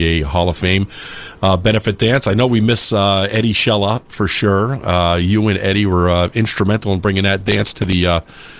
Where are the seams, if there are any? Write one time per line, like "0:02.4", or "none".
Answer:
none